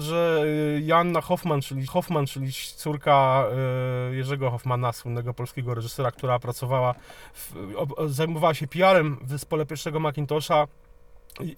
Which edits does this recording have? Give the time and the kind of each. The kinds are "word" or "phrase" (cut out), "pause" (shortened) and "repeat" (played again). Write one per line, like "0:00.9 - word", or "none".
0:01.9 - repeat